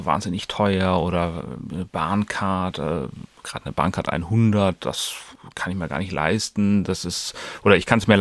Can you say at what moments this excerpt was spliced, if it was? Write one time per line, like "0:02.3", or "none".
none